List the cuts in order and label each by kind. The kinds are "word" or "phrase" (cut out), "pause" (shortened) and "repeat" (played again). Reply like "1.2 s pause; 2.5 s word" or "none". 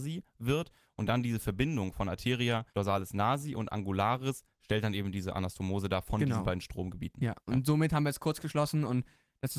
2.7 s pause; 7.4 s pause